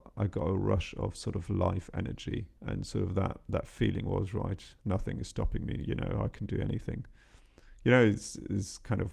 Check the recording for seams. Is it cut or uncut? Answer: cut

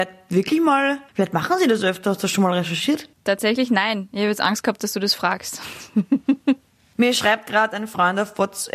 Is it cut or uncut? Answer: cut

